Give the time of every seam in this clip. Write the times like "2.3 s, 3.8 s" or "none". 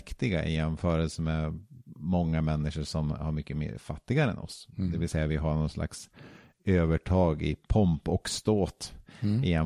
none